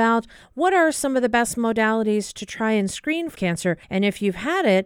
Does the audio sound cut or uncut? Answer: cut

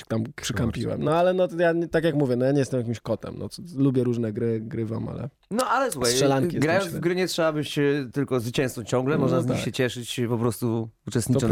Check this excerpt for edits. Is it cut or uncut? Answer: uncut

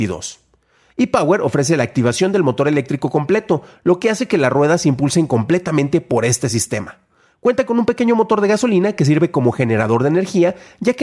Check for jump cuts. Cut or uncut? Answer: uncut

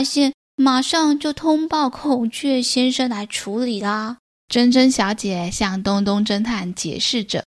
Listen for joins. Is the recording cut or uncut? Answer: cut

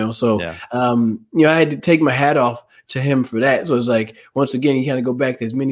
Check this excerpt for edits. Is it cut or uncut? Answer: uncut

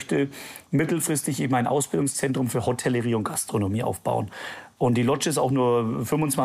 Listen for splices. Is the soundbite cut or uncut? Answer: uncut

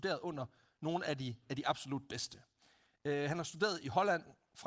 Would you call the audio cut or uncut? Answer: uncut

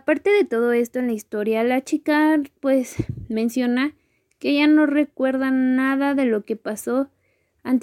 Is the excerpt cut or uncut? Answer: uncut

